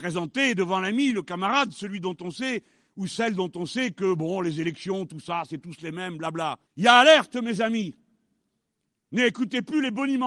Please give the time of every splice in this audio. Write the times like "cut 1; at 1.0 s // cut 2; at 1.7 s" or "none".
cut 1; at 6.7 s

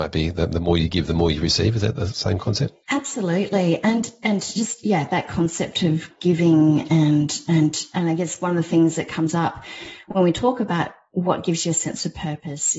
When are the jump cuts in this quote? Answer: cut 1; at 2.8 s

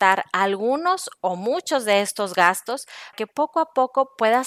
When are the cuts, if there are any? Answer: cut 1; at 3.1 s

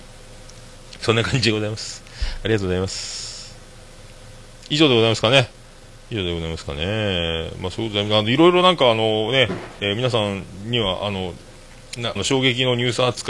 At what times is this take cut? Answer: cut 1; at 12.2 s

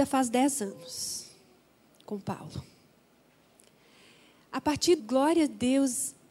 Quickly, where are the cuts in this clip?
cut 1; at 5.0 s

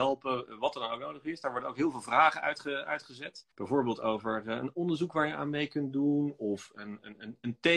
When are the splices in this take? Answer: cut 1; at 3.5 s

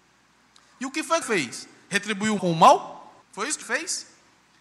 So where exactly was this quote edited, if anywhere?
cut 1; at 1.2 s // cut 2; at 2.4 s // cut 3; at 3.2 s // cut 4; at 3.6 s

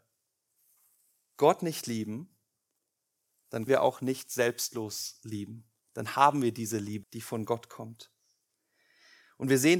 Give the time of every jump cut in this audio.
cut 1; at 3.7 s // cut 2; at 7.0 s

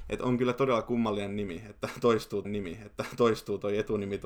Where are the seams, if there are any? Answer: cut 1; at 2.4 s

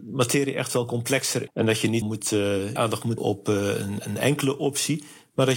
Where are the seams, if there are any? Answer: cut 1; at 1.5 s // cut 2; at 2.0 s // cut 3; at 2.8 s // cut 4; at 3.2 s

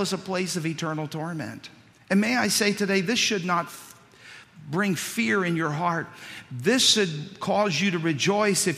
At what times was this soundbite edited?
cut 1; at 1.9 s

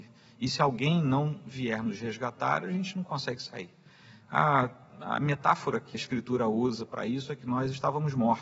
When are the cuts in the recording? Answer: cut 1; at 5.9 s

